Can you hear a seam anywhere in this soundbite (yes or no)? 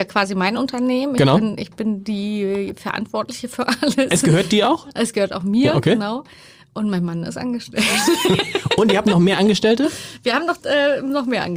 no